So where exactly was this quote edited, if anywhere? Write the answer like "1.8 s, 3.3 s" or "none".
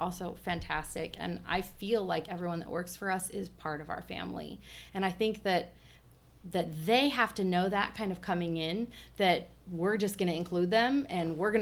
none